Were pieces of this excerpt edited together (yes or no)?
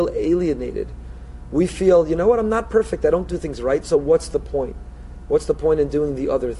no